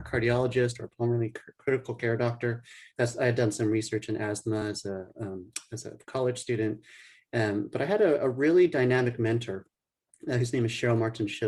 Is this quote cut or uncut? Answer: uncut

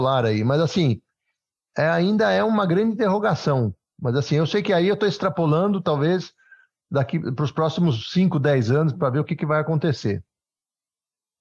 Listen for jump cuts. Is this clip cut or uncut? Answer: uncut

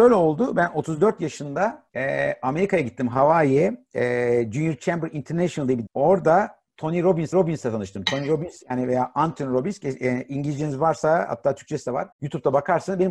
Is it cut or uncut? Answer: cut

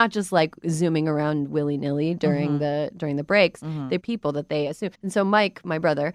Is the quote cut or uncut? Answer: cut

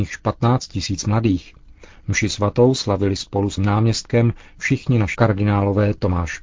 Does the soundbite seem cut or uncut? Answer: cut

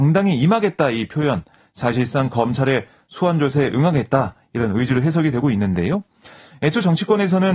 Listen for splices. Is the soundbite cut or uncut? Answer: uncut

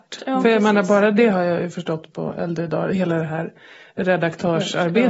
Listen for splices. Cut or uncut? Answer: uncut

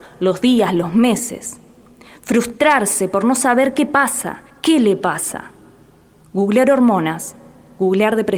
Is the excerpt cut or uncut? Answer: cut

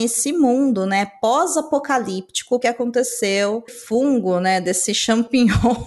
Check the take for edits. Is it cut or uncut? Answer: cut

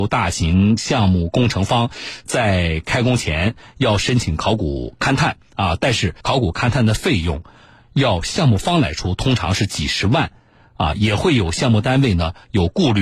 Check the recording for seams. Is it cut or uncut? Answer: cut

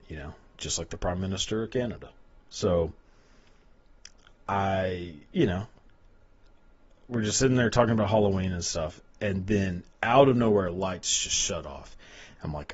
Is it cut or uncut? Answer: uncut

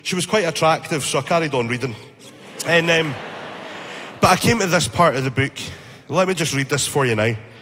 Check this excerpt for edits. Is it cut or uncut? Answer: uncut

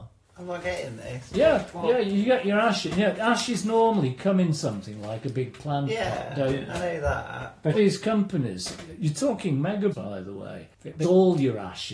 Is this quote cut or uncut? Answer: cut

